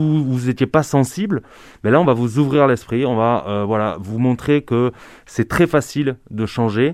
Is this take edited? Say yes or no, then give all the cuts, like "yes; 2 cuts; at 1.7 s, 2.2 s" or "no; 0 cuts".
no; 0 cuts